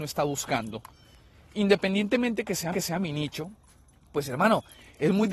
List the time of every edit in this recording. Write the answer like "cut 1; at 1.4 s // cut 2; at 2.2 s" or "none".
cut 1; at 2.7 s // cut 2; at 3.9 s